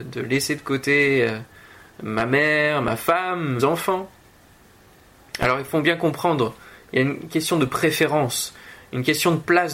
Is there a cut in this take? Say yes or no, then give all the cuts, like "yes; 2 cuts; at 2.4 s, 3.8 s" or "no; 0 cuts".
yes; 1 cut; at 3.6 s